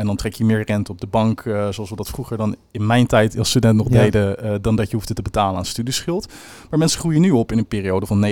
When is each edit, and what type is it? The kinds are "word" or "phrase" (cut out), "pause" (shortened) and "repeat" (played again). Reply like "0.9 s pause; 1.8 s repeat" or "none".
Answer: none